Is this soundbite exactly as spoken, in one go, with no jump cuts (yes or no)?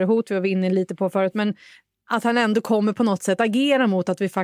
yes